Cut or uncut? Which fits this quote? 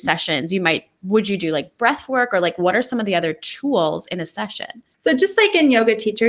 uncut